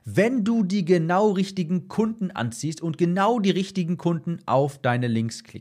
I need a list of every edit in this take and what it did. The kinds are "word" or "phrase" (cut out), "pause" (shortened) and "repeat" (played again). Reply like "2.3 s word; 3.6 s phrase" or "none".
none